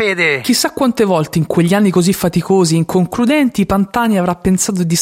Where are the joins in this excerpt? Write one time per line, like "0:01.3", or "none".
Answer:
none